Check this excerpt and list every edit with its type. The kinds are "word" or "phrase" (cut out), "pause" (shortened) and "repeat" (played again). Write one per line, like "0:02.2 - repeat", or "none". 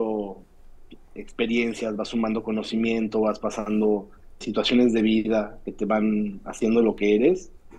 0:04.4 - word